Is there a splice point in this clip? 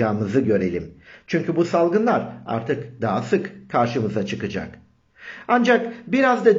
no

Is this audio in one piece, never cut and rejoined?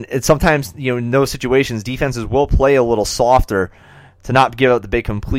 yes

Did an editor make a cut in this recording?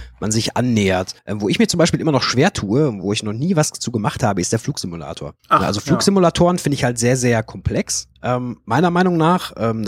yes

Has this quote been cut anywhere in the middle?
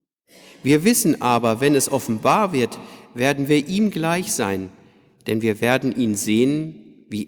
no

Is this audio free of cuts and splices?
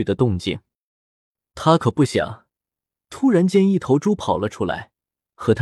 yes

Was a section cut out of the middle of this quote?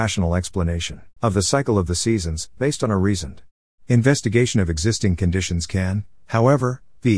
yes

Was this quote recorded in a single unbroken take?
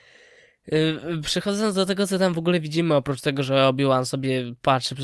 yes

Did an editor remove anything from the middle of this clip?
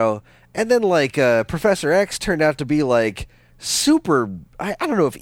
no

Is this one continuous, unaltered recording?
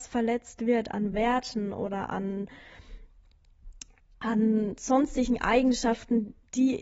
yes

